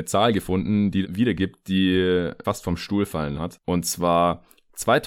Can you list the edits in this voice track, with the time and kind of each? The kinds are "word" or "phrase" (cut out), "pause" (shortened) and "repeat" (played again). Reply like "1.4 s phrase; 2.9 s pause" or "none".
1.0 s word; 2.4 s word; 3.3 s word